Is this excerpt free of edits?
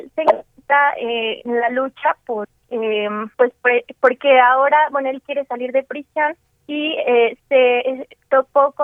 no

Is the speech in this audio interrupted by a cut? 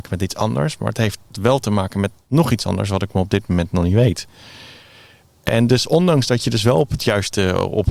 yes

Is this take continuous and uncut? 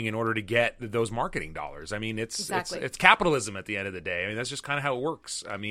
yes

